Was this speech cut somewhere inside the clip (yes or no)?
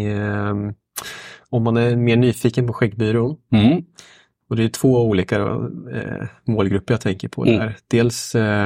no